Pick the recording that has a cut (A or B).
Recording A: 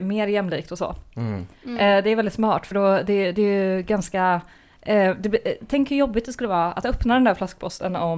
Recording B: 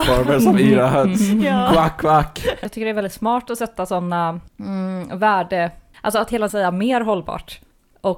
B